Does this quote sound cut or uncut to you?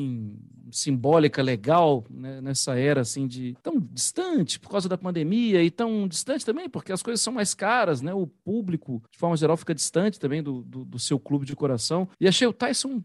cut